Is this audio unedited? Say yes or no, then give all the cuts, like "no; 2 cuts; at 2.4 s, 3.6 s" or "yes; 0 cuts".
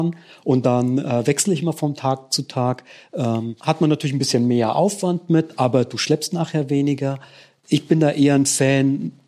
yes; 0 cuts